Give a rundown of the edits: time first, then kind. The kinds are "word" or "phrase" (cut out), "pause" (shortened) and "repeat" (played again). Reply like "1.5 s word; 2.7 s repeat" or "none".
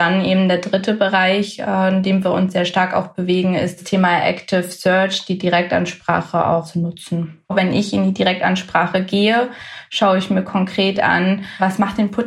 none